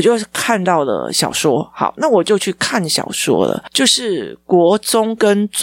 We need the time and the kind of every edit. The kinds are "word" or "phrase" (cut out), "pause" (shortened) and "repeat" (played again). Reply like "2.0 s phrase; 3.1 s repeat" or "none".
none